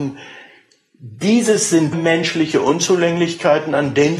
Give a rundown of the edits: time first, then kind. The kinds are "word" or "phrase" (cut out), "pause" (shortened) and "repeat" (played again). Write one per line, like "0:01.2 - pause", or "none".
0:01.9 - word